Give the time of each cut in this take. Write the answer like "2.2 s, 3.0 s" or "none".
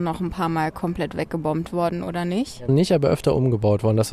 2.7 s